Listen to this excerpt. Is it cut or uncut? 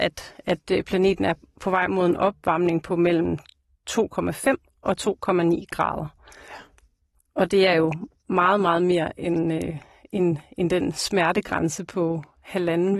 uncut